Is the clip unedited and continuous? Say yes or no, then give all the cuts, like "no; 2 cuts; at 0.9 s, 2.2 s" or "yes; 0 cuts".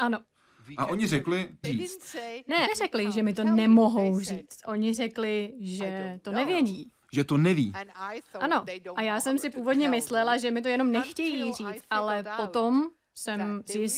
no; 3 cuts; at 1.6 s, 2.7 s, 7.0 s